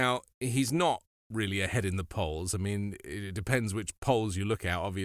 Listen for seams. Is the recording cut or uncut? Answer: uncut